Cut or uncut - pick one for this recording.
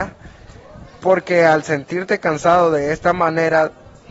uncut